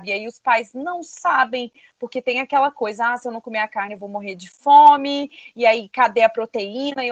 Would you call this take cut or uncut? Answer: uncut